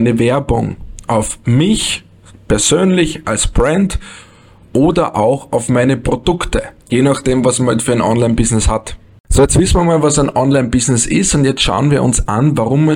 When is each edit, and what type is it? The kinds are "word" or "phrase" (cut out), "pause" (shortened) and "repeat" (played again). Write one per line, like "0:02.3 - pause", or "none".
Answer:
none